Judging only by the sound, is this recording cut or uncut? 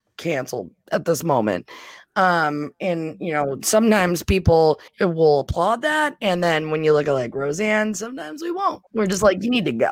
cut